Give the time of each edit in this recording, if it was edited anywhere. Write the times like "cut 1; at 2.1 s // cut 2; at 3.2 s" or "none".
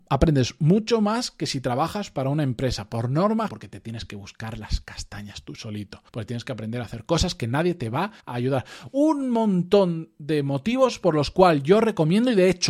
cut 1; at 3.5 s // cut 2; at 6.1 s // cut 3; at 8.2 s

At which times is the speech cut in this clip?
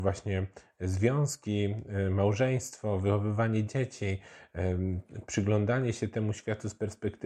none

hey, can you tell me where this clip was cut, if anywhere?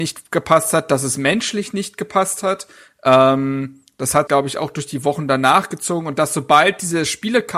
cut 1; at 4.3 s

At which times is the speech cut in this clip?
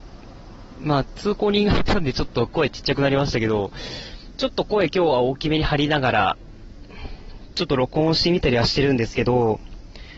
cut 1; at 4.4 s

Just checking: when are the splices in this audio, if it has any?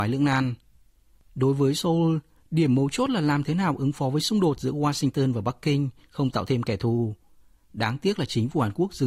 none

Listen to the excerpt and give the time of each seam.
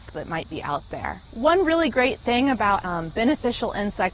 cut 1; at 1.2 s // cut 2; at 2.8 s

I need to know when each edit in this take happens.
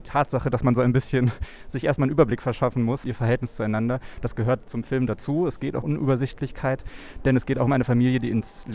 cut 1; at 3.0 s // cut 2; at 5.8 s

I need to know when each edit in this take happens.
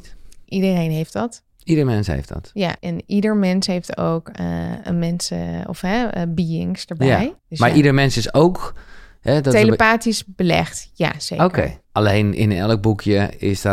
cut 1; at 1.5 s // cut 2; at 2.8 s // cut 3; at 7.4 s // cut 4; at 11.8 s

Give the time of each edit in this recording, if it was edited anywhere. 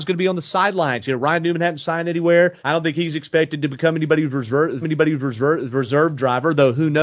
cut 1; at 2.6 s // cut 2; at 4.8 s

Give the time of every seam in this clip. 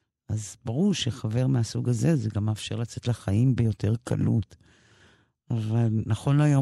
none

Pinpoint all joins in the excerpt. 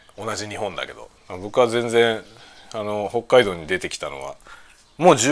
cut 1; at 1.2 s

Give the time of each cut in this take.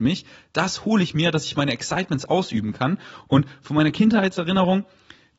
none

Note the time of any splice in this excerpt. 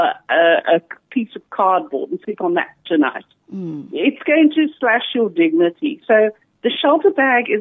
cut 1; at 2.2 s

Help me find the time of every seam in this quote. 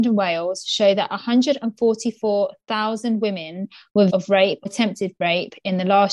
cut 1; at 4.1 s // cut 2; at 4.7 s

